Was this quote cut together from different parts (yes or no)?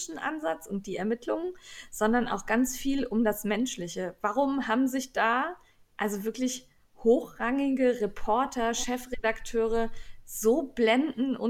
no